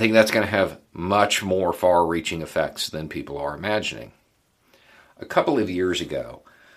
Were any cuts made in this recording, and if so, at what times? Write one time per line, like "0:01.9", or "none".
none